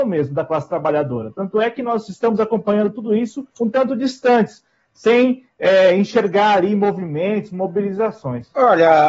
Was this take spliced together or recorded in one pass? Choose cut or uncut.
cut